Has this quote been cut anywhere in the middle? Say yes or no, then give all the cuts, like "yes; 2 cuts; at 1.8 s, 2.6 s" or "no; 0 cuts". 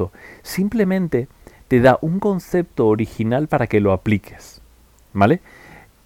no; 0 cuts